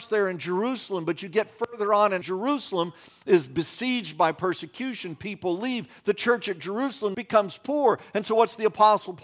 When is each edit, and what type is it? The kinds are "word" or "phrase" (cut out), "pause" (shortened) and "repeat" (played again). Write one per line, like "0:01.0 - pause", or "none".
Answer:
0:02.2 - phrase
0:07.1 - phrase

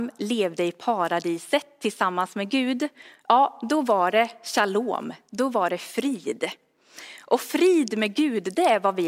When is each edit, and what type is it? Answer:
none

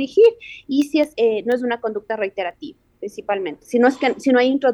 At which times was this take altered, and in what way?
0:01.1 - word

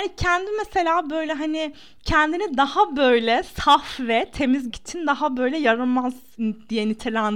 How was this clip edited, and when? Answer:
0:04.7 - word

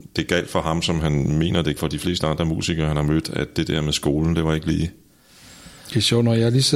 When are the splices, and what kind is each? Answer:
0:01.8 - word

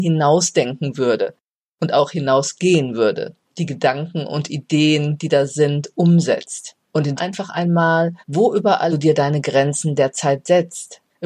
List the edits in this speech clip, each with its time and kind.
0:06.8 - pause
0:07.2 - phrase
0:08.2 - pause
0:08.9 - phrase

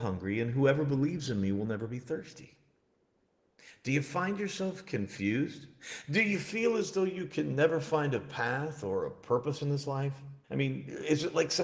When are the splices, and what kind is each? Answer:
0:10.4 - pause

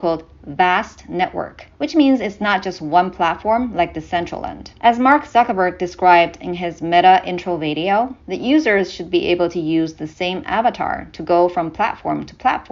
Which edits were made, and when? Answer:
0:01.7 - pause
0:04.8 - pause
0:08.2 - pause

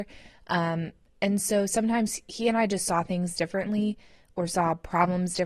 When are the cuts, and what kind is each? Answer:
none

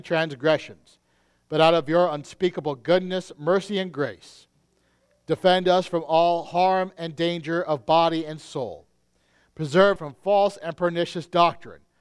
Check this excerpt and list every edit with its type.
0:10.0 - word

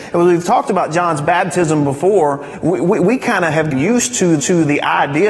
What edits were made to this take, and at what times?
0:03.7 - word
0:04.4 - repeat

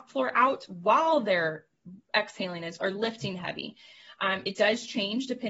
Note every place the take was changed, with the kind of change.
0:02.8 - word

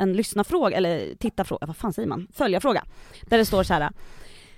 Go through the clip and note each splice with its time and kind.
none

